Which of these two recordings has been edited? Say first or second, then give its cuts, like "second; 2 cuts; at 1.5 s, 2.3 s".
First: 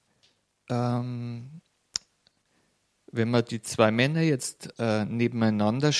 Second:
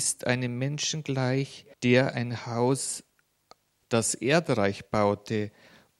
second; 2 cuts; at 1.7 s, 3.8 s